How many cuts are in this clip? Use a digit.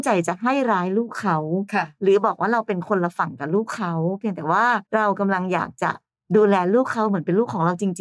2